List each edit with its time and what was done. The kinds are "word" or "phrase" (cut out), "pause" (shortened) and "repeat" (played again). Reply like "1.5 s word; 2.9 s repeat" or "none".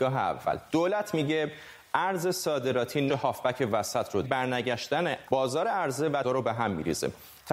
3.1 s word; 4.2 s phrase; 5.2 s word; 6.2 s word